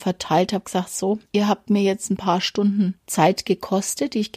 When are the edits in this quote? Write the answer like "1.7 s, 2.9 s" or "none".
1.3 s, 3.0 s

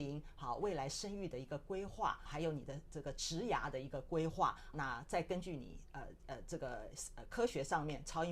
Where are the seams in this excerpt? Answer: 2.3 s, 4.7 s

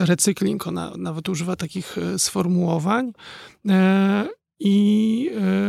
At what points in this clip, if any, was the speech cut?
none

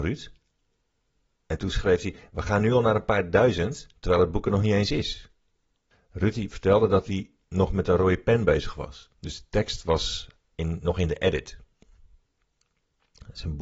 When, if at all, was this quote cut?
3.9 s, 5.9 s, 9.1 s, 10.4 s

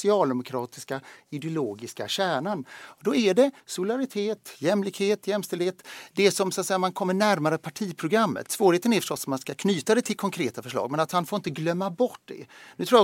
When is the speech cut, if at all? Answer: 3.6 s

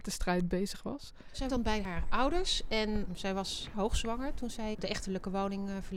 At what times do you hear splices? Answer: 1.5 s, 2.0 s, 4.7 s

